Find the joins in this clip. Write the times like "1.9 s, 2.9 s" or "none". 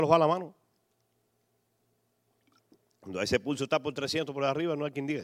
none